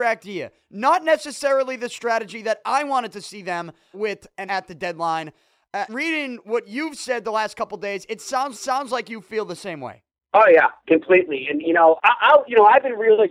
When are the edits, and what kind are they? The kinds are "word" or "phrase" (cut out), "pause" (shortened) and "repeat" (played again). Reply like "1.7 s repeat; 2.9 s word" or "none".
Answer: 3.9 s word; 4.5 s word; 5.9 s word; 8.5 s repeat; 10.1 s pause; 12.0 s word